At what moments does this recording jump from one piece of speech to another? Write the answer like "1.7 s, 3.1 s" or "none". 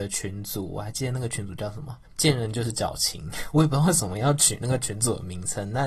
2.0 s